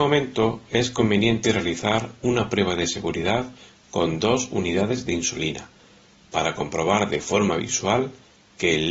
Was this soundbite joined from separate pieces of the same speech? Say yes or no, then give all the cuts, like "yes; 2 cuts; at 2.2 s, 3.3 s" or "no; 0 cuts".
no; 0 cuts